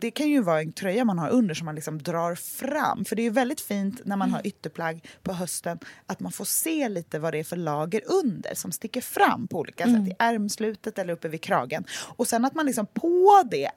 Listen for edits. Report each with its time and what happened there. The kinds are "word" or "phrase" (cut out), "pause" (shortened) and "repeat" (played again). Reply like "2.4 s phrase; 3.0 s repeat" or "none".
none

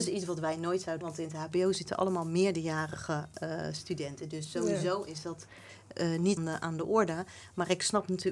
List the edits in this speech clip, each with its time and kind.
1.0 s word; 6.4 s word

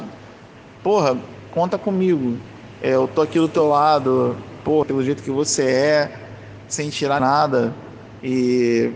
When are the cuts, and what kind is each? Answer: 4.8 s phrase; 7.2 s phrase

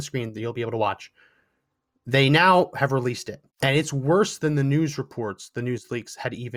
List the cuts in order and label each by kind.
3.5 s pause

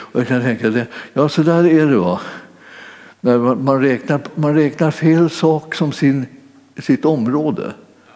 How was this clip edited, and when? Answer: none

